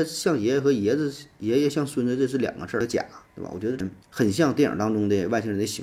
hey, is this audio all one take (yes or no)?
no